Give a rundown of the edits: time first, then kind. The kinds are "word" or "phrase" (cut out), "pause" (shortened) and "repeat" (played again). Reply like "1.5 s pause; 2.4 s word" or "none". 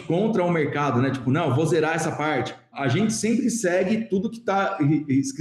none